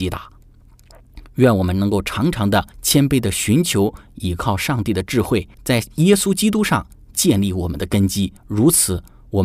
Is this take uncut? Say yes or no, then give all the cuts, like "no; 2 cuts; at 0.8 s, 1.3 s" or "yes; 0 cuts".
no; 3 cuts; at 2.7 s, 5.5 s, 8.4 s